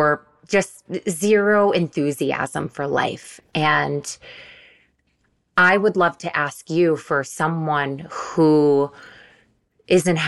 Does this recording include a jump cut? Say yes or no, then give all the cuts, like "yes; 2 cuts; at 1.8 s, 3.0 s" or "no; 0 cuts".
no; 0 cuts